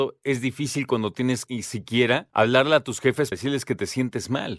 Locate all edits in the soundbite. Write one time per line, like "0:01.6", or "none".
0:01.5
0:02.3
0:03.3